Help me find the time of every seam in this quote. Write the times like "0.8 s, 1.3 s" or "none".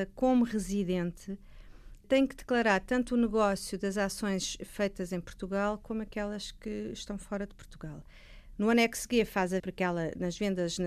9.6 s